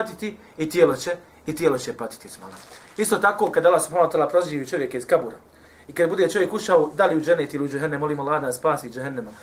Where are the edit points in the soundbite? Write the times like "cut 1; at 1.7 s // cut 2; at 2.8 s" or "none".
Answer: none

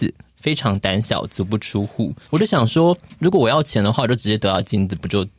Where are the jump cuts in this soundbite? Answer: cut 1; at 2.2 s

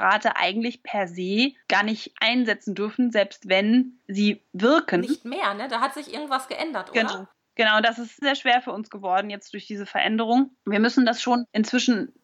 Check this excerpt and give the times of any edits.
cut 1; at 8.2 s

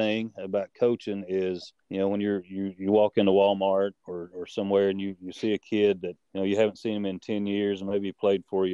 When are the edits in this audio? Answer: cut 1; at 1.8 s // cut 2; at 6.2 s

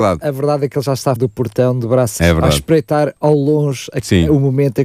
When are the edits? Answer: cut 1; at 1.2 s // cut 2; at 2.2 s

